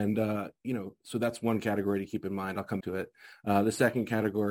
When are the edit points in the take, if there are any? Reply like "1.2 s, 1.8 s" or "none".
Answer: 2.8 s